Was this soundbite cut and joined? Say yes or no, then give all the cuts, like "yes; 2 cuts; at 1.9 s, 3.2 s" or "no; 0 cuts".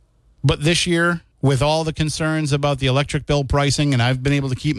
yes; 1 cut; at 1.3 s